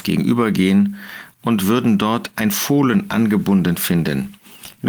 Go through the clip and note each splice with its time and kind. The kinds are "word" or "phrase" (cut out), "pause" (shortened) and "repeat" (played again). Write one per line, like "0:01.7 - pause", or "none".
none